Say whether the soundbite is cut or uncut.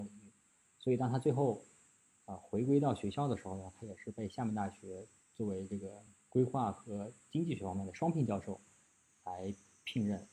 uncut